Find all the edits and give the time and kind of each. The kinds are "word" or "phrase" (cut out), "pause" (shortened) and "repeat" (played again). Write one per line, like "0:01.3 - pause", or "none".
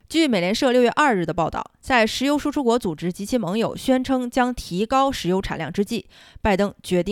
none